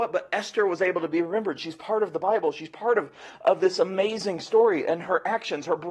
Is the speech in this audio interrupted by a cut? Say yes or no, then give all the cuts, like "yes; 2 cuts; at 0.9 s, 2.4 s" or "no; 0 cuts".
no; 0 cuts